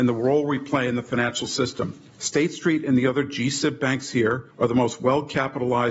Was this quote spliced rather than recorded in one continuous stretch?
yes; 2 cuts; at 2.1 s, 4.5 s

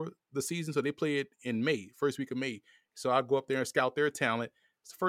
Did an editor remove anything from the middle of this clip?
no; 0 cuts

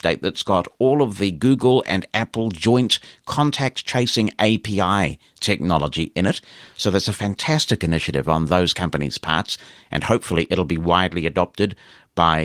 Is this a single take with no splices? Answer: yes; 0 cuts

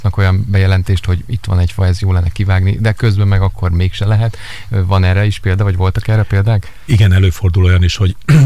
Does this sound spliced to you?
no; 0 cuts

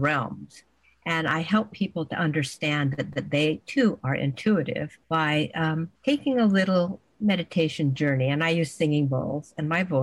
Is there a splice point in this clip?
yes; 3 cuts; at 3.1 s, 5.0 s, 6.0 s

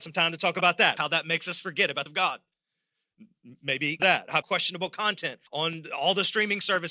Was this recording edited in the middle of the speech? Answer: yes; 5 cuts; at 1.0 s, 2.1 s, 4.0 s, 4.4 s, 5.5 s

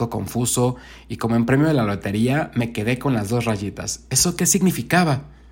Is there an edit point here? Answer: no; 0 cuts

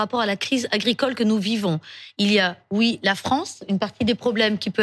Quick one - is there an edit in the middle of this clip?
no; 0 cuts

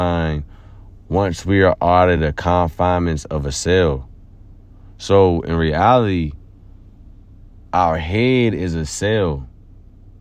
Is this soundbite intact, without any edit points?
yes; 0 cuts

